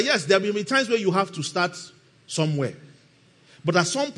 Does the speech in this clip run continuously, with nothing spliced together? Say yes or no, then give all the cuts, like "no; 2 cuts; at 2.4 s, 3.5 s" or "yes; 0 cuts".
yes; 0 cuts